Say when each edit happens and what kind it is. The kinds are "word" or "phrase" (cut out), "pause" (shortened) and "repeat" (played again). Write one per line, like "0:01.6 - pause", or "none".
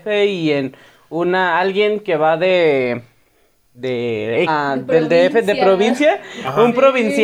0:04.5 - word